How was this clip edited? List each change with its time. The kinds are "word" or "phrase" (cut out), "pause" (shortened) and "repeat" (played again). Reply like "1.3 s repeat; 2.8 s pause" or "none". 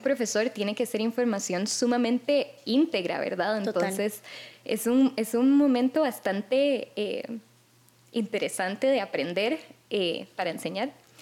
none